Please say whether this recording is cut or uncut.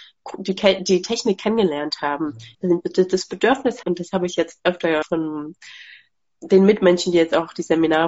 cut